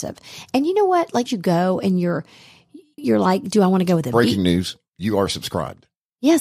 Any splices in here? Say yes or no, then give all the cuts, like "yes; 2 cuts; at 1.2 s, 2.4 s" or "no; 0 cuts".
yes; 2 cuts; at 1.3 s, 3.0 s